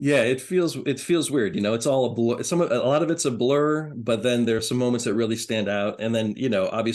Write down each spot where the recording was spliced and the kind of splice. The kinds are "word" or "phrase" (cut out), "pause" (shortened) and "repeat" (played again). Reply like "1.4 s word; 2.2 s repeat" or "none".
none

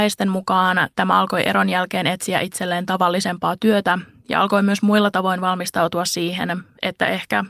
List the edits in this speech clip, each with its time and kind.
none

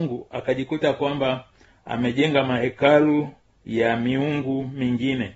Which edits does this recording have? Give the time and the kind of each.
none

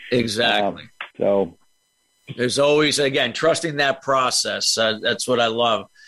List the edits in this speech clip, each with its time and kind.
1.1 s pause

